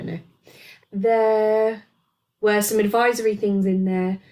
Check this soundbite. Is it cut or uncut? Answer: uncut